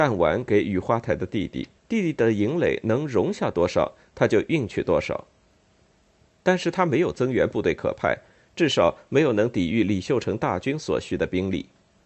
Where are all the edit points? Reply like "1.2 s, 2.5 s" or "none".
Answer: 1.8 s